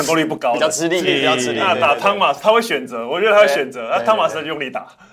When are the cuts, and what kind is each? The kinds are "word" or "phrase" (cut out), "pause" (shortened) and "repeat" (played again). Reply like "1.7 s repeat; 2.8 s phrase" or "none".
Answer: 1.0 s word